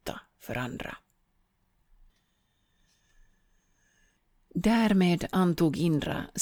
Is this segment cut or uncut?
uncut